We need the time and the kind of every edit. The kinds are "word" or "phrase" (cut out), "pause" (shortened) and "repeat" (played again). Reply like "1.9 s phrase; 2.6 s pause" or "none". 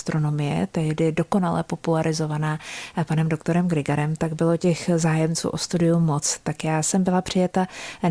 none